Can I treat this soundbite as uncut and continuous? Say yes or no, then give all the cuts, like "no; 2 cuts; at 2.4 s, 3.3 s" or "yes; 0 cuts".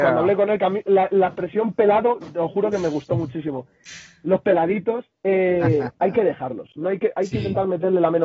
yes; 0 cuts